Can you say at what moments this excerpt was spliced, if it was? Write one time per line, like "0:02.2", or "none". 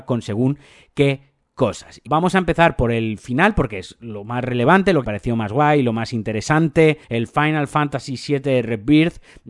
0:02.1
0:05.0
0:07.0